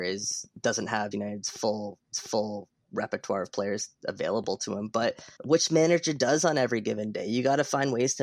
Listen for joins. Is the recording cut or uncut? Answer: cut